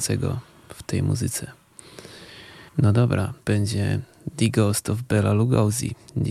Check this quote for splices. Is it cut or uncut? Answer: cut